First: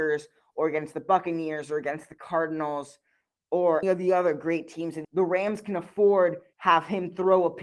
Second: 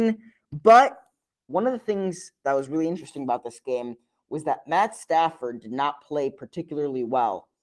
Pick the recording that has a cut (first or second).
first